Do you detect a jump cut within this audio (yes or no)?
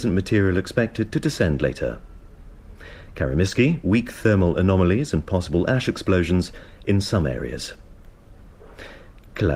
no